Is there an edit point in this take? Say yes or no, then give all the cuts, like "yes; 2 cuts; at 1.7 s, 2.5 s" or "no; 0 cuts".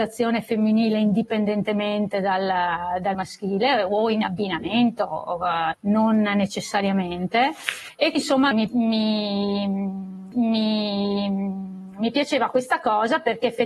yes; 5 cuts; at 3.1 s, 5.7 s, 8.1 s, 8.5 s, 10.3 s